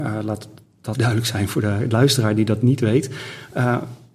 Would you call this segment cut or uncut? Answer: cut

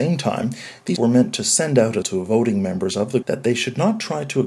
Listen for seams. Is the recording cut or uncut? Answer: cut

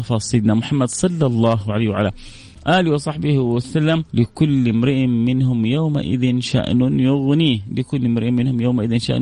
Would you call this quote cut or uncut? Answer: cut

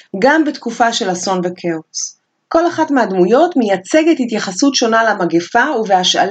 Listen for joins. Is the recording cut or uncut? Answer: uncut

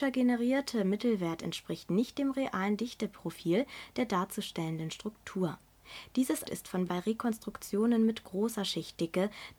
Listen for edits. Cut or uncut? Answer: cut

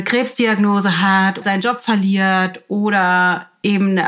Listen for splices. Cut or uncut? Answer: cut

